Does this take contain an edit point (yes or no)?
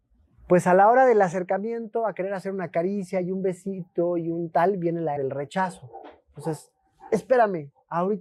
yes